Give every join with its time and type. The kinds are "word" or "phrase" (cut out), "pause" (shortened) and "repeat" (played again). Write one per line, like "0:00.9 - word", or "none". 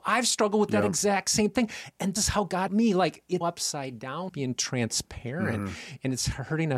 0:02.2 - word
0:02.7 - word
0:03.4 - word
0:04.3 - phrase